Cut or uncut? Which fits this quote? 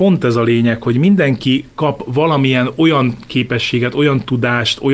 uncut